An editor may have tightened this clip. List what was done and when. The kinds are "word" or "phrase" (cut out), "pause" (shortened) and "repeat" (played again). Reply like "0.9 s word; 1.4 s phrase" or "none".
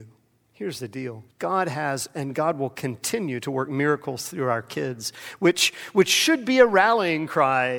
1.3 s pause